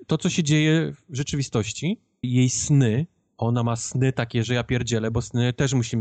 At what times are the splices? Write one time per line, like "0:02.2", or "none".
0:02.2